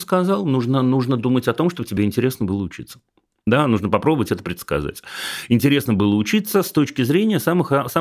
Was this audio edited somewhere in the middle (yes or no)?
no